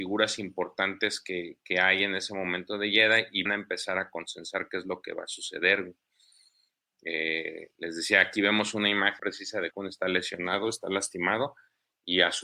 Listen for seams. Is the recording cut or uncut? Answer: cut